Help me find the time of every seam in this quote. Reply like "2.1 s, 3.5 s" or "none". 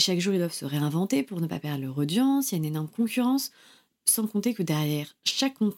none